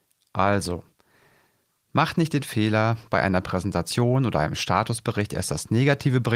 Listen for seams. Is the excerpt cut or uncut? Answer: uncut